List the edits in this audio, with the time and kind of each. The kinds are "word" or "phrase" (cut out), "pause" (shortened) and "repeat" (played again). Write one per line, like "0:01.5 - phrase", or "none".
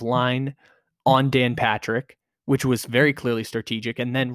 0:02.3 - pause